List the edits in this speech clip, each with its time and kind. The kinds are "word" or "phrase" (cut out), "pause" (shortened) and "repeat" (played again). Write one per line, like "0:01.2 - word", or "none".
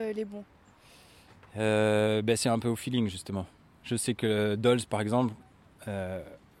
none